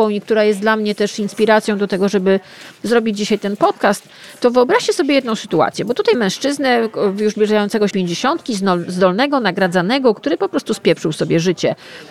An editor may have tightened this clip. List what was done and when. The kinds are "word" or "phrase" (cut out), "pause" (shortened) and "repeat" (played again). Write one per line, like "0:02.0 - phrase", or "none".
0:06.1 - word
0:07.9 - word